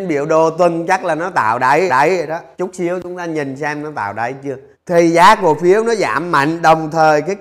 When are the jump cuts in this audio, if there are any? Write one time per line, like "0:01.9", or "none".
0:01.9
0:02.5
0:04.7